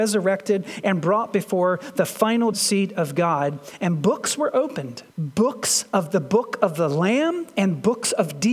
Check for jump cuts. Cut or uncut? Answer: cut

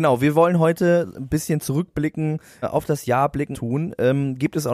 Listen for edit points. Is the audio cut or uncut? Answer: cut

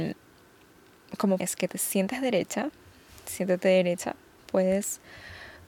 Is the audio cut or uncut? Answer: cut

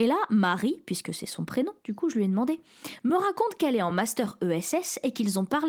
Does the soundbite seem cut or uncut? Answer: uncut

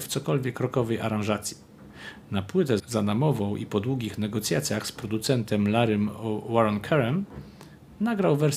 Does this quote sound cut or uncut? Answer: cut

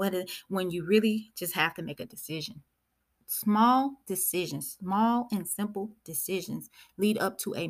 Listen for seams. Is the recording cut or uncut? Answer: uncut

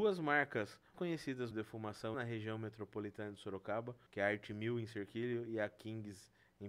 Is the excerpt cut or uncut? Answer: cut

